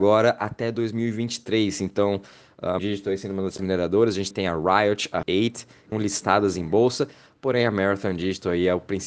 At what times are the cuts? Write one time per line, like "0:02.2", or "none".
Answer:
0:02.8
0:03.6
0:04.3
0:05.2
0:05.9